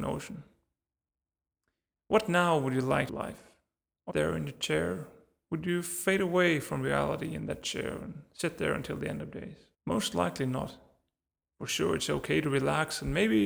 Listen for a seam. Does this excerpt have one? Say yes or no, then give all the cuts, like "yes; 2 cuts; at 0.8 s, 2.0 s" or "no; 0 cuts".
yes; 3 cuts; at 3.1 s, 4.1 s, 9.7 s